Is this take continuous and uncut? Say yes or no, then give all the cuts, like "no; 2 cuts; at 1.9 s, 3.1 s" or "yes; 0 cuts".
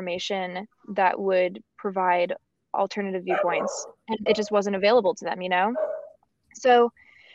no; 1 cut; at 4.3 s